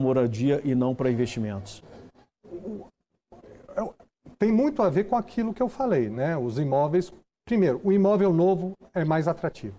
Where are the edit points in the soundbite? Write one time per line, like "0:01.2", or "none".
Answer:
none

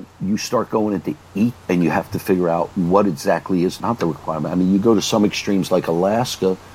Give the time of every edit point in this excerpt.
0:01.5
0:03.8

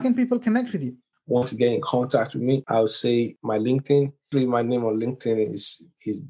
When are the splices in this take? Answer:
0:01.1

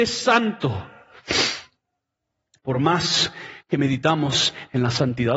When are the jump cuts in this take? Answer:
none

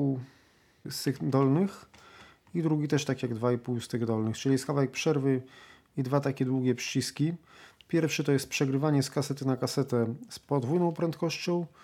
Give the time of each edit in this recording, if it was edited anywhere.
none

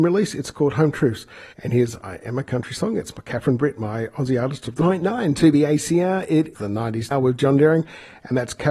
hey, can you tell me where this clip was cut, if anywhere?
0:01.5
0:06.5
0:07.1

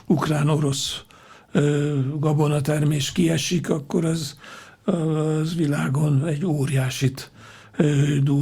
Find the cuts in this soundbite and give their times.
none

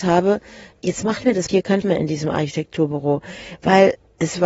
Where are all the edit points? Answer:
0:01.5
0:01.8

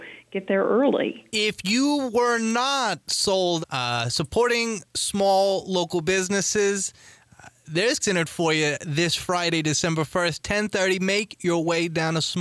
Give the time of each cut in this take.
0:01.3
0:03.6
0:08.0

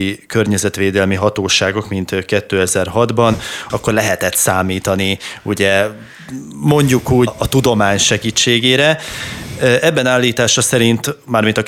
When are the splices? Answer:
0:03.7
0:07.3

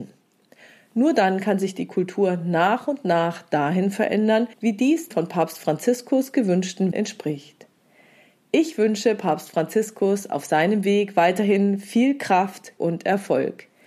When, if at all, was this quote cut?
0:04.5
0:05.1
0:06.9
0:12.8

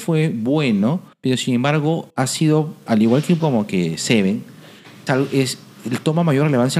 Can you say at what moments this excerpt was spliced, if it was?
0:01.1
0:02.1
0:02.9
0:03.4
0:05.1

